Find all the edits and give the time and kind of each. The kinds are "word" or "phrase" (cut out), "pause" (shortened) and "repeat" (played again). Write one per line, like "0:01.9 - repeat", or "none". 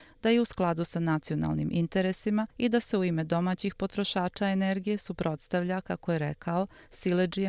0:02.5 - pause